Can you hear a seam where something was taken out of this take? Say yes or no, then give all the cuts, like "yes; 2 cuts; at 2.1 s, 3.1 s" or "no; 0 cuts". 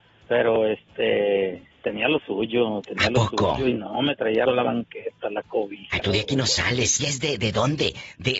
yes; 4 cuts; at 1.7 s, 4.5 s, 6.0 s, 7.0 s